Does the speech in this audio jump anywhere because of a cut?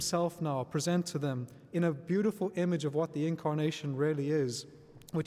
no; 0 cuts

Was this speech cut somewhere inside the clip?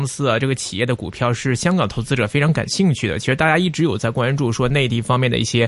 no; 0 cuts

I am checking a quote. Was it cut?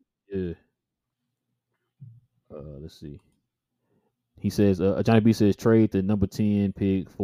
no; 0 cuts

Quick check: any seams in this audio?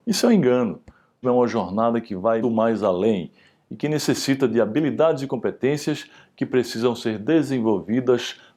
yes; 2 cuts; at 1.2 s, 2.4 s

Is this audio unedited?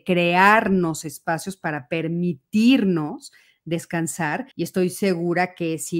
no; 1 cut; at 4.5 s

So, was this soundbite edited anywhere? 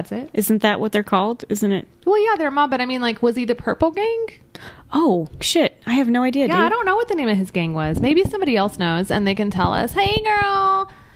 no; 0 cuts

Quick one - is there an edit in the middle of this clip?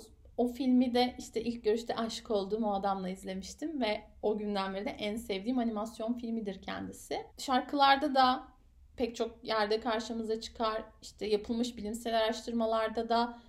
yes; 1 cut; at 7.3 s

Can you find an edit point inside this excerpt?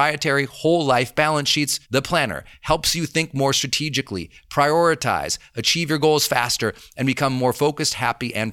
yes; 1 cut; at 1.8 s

